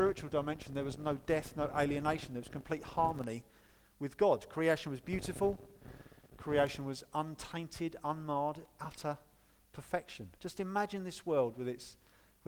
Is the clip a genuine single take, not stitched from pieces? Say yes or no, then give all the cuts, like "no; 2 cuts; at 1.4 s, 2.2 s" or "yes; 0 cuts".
no; 1 cut; at 10.4 s